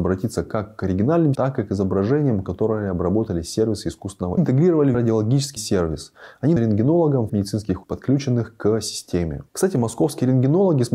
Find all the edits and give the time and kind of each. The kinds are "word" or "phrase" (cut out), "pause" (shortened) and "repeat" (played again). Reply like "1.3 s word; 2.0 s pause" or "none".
1.3 s word; 4.4 s phrase; 4.9 s word; 5.6 s word; 6.6 s word; 7.3 s word; 7.8 s word

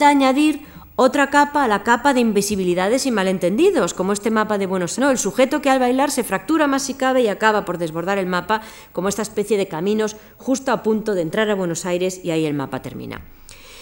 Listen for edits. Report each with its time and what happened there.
5.0 s word

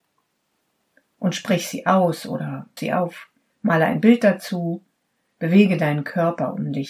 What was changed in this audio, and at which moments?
2.8 s word

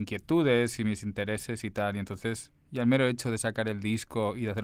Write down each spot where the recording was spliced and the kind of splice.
none

